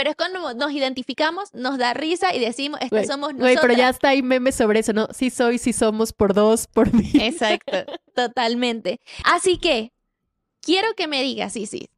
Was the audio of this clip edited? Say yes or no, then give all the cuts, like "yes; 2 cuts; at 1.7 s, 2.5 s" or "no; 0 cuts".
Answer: no; 0 cuts